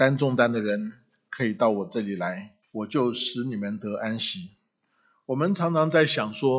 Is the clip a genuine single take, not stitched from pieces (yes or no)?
no